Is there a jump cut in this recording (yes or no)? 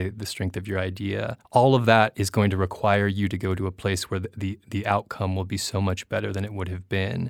yes